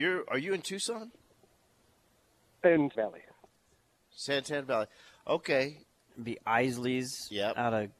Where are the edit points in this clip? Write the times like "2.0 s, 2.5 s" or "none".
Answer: 2.9 s